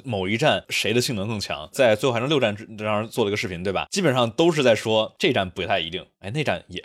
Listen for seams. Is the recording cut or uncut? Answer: uncut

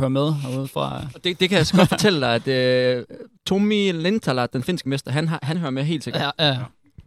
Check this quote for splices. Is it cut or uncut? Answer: cut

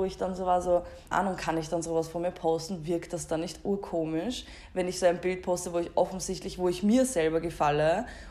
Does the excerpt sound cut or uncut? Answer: cut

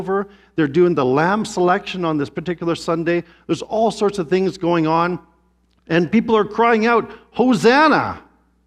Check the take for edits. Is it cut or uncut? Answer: uncut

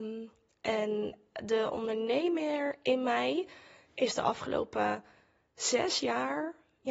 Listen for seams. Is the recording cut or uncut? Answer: uncut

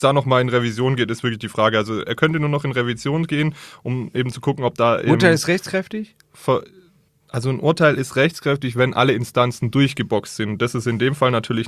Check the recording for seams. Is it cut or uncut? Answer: cut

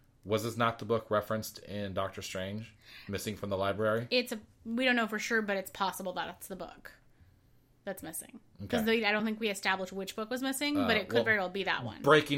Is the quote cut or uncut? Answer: uncut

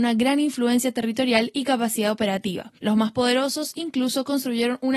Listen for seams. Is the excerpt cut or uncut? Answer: cut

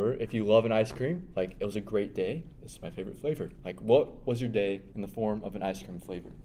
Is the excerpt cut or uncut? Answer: cut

